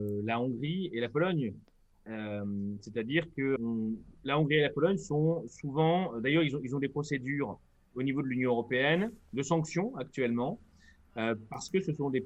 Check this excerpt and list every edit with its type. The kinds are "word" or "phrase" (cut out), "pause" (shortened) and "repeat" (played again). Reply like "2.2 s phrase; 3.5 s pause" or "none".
3.6 s word; 7.9 s word